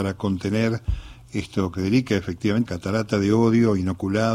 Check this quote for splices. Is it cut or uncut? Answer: cut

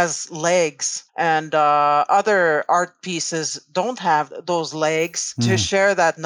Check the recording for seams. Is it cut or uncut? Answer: cut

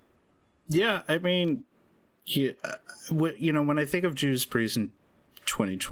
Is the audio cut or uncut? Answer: uncut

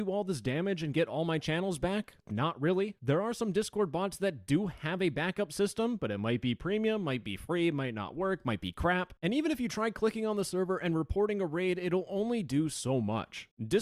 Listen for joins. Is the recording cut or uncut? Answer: uncut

